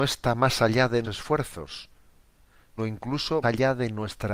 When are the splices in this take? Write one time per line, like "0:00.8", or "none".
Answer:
0:01.0
0:02.8
0:03.4